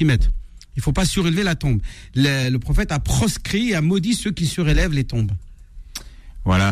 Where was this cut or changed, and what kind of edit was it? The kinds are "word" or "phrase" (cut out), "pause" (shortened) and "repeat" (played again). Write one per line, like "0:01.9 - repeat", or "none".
none